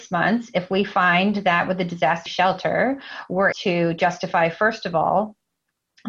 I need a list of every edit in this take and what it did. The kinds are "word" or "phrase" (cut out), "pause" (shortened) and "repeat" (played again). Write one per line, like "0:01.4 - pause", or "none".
0:02.3 - word
0:03.5 - word